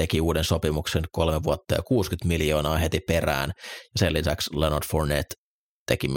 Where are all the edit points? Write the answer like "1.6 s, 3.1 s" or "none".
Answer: none